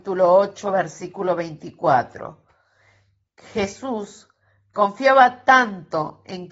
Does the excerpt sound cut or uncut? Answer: uncut